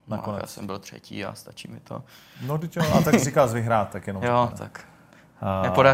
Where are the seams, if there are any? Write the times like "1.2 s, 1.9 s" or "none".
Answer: 4.5 s